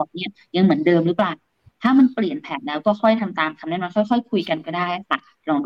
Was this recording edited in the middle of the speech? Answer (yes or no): no